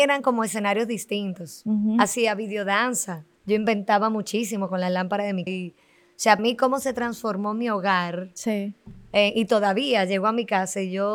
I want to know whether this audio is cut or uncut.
cut